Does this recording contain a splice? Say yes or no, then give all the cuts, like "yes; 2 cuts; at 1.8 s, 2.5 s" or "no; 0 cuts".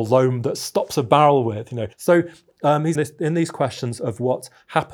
yes; 2 cuts; at 1.9 s, 2.9 s